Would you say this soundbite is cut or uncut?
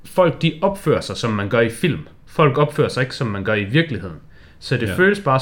uncut